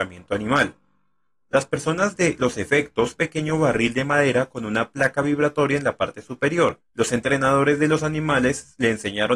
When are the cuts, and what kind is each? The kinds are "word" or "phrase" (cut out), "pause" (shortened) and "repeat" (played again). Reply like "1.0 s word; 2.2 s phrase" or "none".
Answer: 3.2 s phrase; 6.9 s pause